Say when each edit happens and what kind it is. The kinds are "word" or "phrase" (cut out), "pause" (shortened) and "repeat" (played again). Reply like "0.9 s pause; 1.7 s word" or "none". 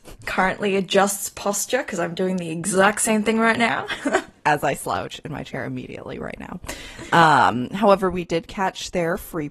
none